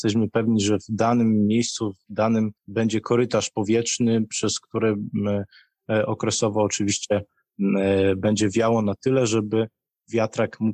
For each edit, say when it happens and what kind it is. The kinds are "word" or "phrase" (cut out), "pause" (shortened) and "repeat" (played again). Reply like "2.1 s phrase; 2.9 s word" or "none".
2.6 s pause